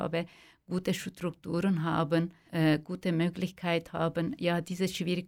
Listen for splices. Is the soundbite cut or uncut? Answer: cut